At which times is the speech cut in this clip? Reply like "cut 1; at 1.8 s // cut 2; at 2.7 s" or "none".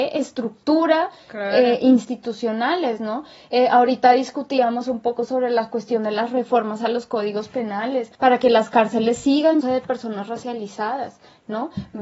cut 1; at 8.1 s // cut 2; at 9.6 s